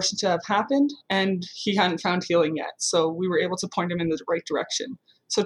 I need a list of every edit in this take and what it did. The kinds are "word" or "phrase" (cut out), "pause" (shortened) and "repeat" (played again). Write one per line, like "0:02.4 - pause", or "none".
0:01.0 - pause